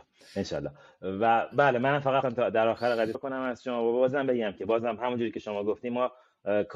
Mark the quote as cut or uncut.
cut